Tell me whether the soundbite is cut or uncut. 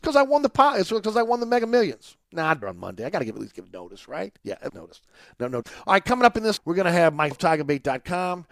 cut